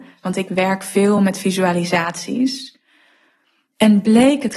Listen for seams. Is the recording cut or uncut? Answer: uncut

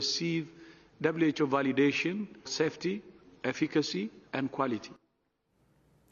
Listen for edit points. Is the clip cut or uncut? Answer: cut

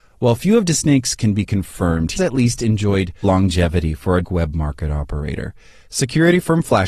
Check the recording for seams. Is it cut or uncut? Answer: cut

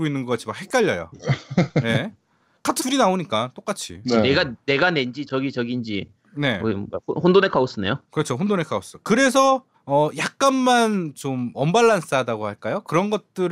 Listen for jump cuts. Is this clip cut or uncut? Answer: cut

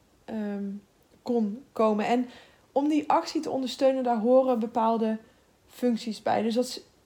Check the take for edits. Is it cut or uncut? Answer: uncut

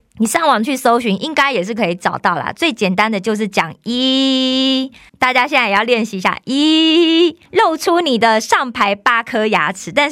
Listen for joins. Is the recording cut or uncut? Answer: cut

